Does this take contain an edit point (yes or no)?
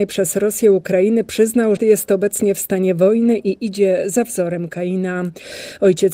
yes